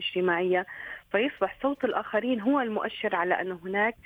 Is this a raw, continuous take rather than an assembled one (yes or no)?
yes